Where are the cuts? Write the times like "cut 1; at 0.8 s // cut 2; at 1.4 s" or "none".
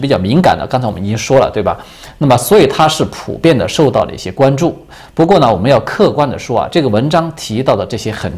none